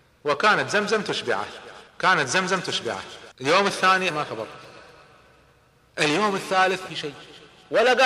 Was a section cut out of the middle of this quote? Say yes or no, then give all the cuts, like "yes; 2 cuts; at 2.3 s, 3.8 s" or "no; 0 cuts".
yes; 4 cuts; at 1.9 s, 3.3 s, 4.1 s, 6.9 s